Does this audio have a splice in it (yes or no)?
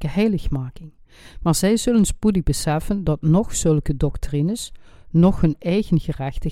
no